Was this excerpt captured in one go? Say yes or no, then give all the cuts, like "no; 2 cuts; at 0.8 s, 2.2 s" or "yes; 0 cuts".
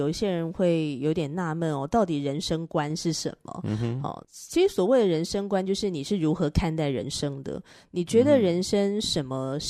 yes; 0 cuts